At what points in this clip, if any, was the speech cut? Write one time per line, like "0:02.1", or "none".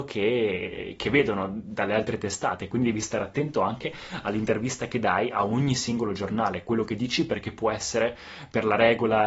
none

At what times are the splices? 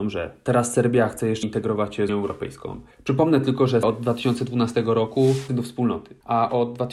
0:01.4
0:02.1
0:02.9
0:03.8
0:05.5

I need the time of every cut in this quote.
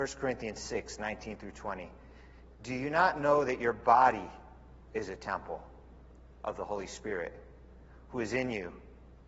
none

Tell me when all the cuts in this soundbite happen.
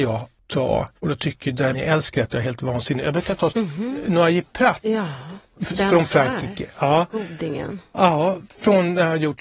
0:01.0
0:01.7
0:03.5

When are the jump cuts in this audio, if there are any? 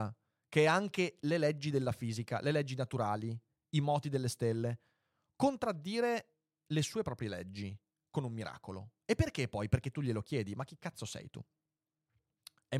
none

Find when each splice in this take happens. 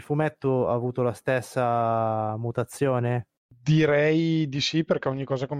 none

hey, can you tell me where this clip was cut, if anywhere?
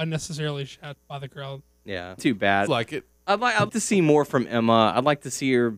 0:01.0
0:02.2
0:02.7
0:03.7

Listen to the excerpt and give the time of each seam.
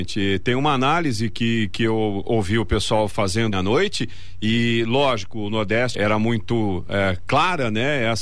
0:03.5
0:05.9

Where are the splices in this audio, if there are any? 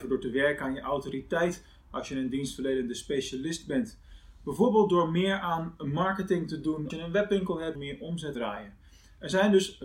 0:06.9
0:07.7
0:08.3

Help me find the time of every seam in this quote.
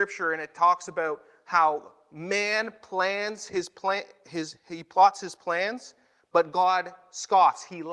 none

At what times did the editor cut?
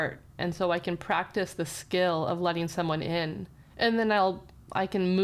0:03.6

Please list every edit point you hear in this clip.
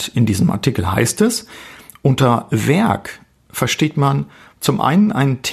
none

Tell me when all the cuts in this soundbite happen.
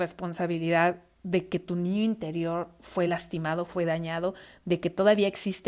none

